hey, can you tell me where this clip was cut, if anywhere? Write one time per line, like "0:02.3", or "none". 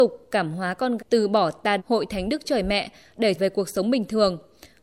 0:01.0
0:01.8
0:02.4
0:03.4